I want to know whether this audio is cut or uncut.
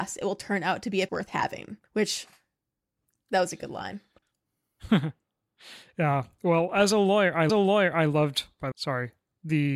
cut